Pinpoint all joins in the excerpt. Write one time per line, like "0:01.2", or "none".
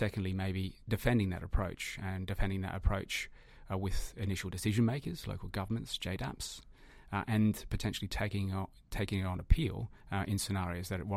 0:10.0

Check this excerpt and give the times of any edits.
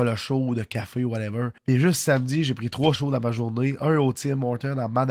0:01.6
0:03.0

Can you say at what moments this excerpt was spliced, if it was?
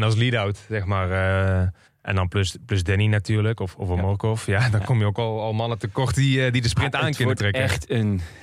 0:01.9

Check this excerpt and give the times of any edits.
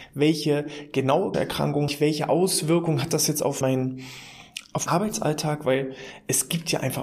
0:01.3
0:01.9
0:03.6
0:04.9

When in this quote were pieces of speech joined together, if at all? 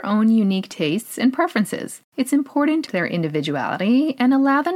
0:02.0
0:02.9

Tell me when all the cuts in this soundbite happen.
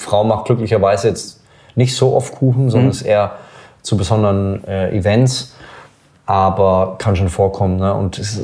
none

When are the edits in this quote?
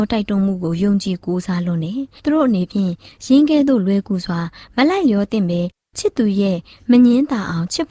none

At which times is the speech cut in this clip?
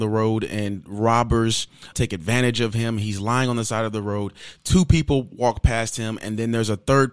0:01.9

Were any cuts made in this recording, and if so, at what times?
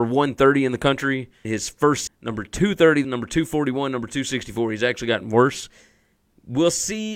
0:01.4
0:02.1
0:03.0

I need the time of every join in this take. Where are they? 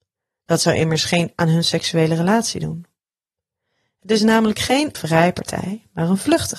0:01.3
0:04.9

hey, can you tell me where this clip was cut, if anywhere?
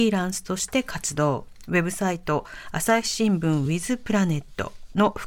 none

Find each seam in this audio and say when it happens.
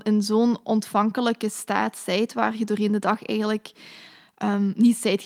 none

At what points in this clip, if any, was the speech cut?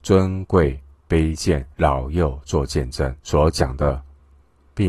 0:01.7
0:03.2

